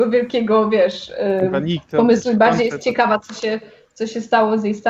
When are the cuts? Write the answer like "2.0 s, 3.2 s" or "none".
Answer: none